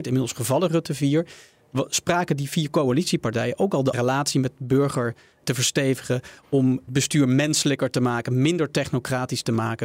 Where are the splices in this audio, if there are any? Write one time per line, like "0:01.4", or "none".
0:03.9
0:06.9